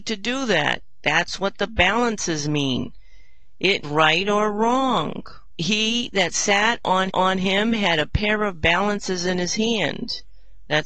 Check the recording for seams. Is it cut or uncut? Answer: cut